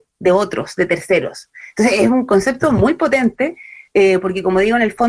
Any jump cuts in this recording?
no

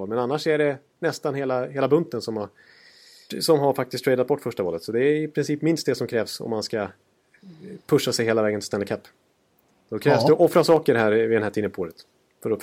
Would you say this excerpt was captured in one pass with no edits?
yes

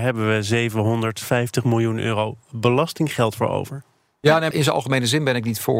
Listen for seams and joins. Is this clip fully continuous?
no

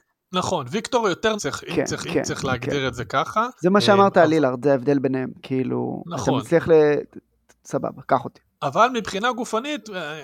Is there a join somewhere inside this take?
yes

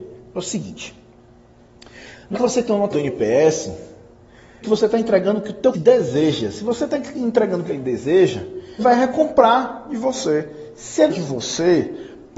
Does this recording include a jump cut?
yes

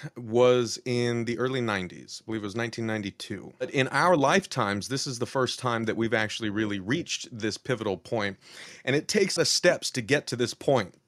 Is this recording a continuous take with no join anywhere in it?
no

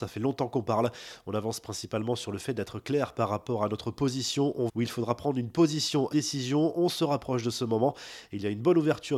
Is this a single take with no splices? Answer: no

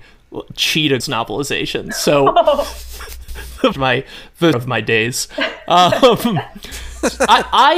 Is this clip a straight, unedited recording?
no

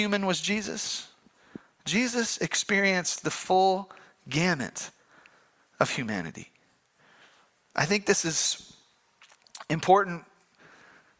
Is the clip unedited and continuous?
yes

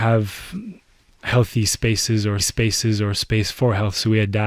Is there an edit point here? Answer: yes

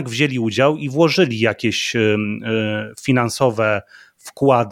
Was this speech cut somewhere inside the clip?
no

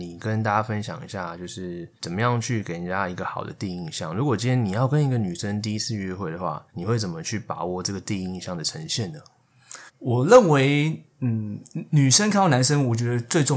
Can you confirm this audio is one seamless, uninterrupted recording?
no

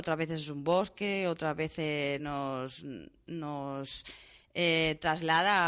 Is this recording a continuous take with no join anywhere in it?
yes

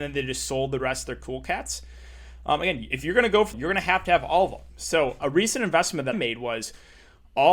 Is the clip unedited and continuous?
no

